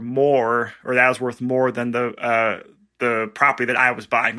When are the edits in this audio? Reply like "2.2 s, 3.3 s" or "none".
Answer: none